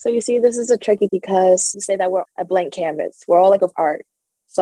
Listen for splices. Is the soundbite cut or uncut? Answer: cut